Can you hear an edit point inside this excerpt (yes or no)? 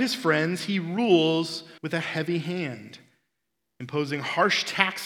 yes